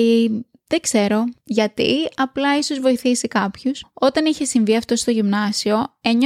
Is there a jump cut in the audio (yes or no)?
no